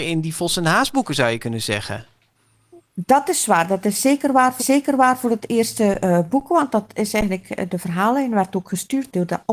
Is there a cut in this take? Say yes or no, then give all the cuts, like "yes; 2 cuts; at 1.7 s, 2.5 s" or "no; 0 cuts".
yes; 1 cut; at 4.6 s